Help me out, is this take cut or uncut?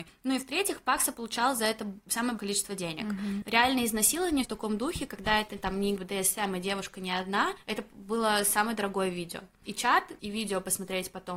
cut